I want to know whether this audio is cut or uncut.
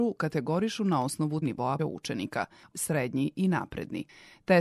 cut